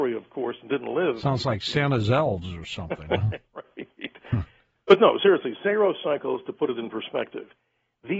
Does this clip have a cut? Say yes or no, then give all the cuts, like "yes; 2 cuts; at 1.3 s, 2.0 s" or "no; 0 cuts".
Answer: no; 0 cuts